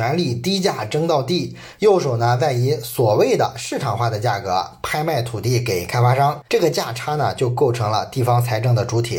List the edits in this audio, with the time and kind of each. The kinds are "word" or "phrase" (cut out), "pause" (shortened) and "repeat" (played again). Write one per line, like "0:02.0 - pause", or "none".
0:06.5 - pause